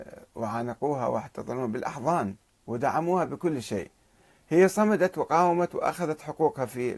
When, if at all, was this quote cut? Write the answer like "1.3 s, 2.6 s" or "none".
none